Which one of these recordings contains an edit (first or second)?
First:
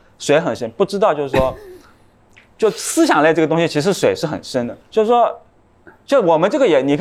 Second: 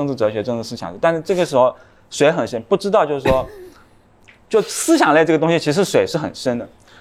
first